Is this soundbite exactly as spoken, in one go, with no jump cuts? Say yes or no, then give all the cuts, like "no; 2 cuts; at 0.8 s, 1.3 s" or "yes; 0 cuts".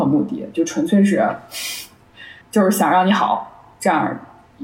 no; 1 cut; at 2.4 s